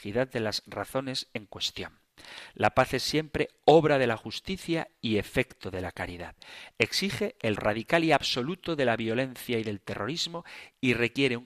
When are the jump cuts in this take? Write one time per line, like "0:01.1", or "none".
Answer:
0:07.6